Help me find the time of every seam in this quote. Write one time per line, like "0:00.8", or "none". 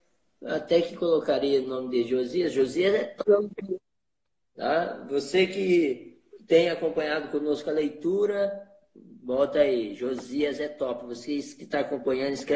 none